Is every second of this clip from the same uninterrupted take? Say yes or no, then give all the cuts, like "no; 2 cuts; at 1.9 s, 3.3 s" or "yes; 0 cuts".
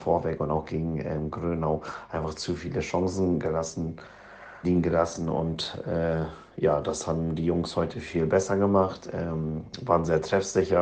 no; 1 cut; at 4.6 s